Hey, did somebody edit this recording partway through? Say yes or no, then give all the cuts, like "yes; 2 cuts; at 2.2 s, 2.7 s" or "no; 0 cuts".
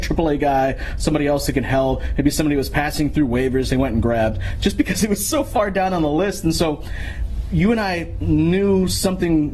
no; 0 cuts